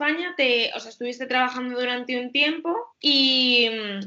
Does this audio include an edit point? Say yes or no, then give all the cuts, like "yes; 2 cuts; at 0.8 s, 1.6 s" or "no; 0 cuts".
yes; 1 cut; at 2.9 s